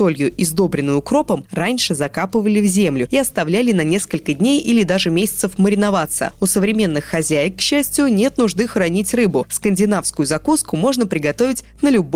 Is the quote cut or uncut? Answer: uncut